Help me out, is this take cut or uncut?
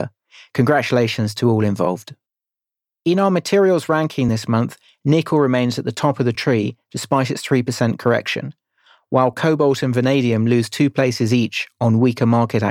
uncut